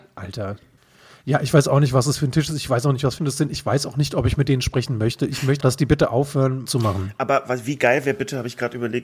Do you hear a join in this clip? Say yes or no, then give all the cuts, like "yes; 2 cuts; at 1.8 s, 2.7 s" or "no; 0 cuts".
yes; 3 cuts; at 3.2 s, 5.6 s, 6.7 s